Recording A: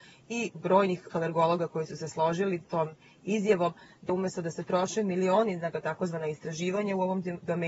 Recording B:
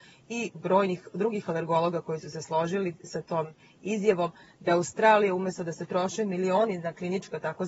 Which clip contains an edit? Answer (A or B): A